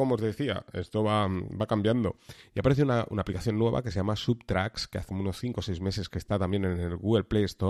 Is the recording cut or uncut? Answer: cut